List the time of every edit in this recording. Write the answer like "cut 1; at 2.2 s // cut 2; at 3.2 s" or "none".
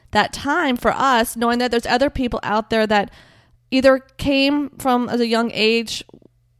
none